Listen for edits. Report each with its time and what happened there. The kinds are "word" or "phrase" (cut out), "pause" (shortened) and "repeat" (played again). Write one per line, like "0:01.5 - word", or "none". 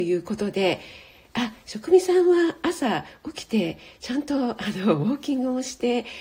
none

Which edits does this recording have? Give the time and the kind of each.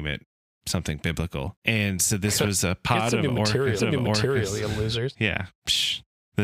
0:01.6 - pause
0:03.8 - repeat

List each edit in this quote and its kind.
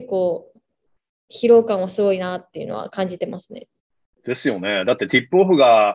none

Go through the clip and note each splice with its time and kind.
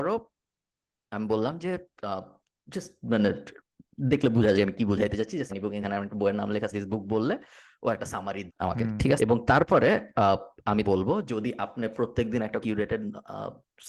0:04.5 - word
0:05.5 - word
0:05.8 - word
0:06.7 - word
0:08.5 - word
0:09.2 - word
0:10.8 - word
0:11.3 - word
0:12.6 - word

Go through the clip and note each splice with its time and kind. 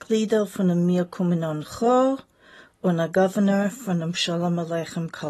none

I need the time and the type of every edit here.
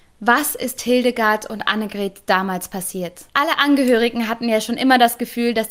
none

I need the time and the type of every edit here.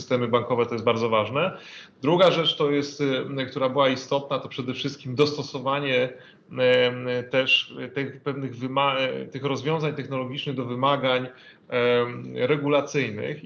none

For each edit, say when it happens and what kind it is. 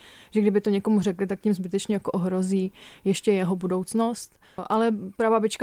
none

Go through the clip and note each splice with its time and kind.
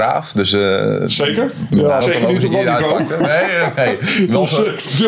0:02.0 - word

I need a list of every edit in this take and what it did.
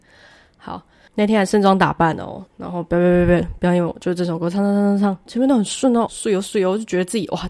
0:02.5 - pause
0:05.3 - word
0:06.1 - word

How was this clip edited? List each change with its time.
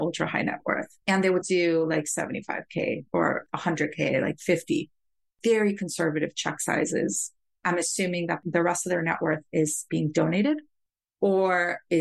0:01.0 - pause
0:01.4 - word

